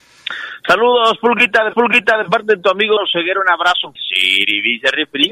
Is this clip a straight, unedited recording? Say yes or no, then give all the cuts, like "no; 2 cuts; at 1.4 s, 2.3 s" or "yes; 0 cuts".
no; 3 cuts; at 1.7 s, 3.0 s, 4.0 s